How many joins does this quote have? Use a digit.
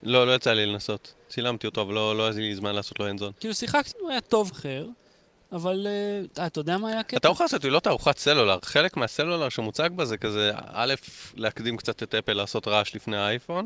3